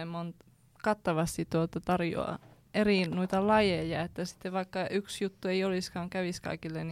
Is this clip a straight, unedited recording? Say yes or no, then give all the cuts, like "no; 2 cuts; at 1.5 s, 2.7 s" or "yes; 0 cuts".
yes; 0 cuts